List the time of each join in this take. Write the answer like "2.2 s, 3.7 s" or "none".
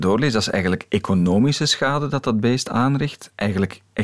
none